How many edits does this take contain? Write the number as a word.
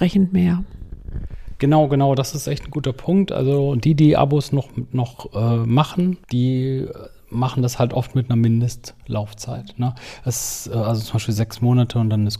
one